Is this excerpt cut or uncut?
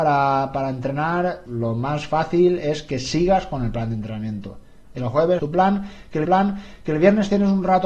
cut